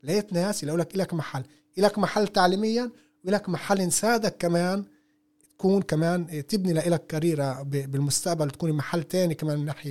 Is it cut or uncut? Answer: uncut